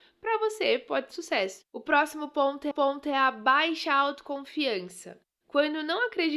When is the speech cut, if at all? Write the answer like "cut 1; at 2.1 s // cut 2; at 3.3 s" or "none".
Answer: cut 1; at 1.1 s // cut 2; at 1.7 s // cut 3; at 2.7 s